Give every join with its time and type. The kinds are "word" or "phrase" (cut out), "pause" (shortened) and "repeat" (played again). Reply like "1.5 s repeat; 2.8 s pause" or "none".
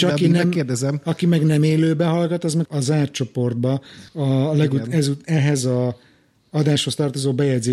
2.6 s phrase; 4.1 s pause

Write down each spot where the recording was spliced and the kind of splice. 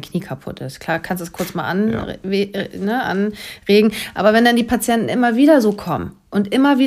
none

